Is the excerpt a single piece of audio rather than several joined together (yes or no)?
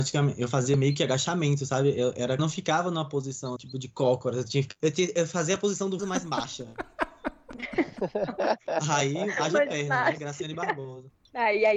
no